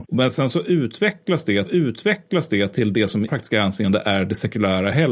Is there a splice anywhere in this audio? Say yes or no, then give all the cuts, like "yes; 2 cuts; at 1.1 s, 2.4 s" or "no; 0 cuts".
yes; 2 cuts; at 1.7 s, 3.3 s